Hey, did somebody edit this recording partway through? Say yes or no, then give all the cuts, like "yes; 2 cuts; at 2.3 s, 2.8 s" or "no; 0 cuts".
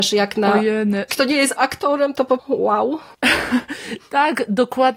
yes; 3 cuts; at 1.1 s, 1.6 s, 2.4 s